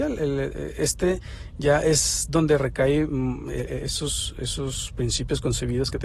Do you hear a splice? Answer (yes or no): no